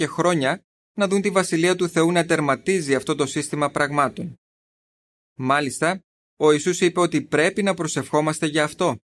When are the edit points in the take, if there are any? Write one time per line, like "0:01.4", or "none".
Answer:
none